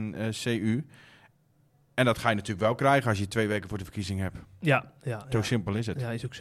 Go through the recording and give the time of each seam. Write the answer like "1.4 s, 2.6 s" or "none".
none